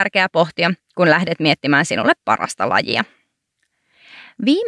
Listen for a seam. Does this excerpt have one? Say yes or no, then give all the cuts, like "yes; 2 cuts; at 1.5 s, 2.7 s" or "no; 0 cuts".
no; 0 cuts